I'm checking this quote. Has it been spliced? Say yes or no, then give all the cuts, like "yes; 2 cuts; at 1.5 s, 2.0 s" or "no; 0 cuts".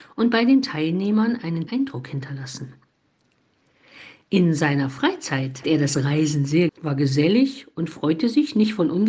yes; 3 cuts; at 1.7 s, 5.6 s, 6.7 s